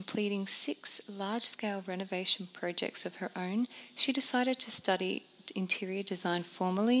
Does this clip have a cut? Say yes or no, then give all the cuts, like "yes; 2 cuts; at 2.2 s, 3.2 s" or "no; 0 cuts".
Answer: no; 0 cuts